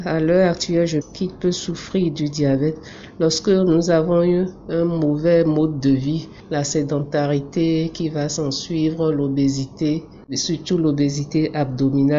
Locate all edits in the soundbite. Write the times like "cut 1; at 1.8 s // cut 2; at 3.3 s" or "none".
cut 1; at 1.0 s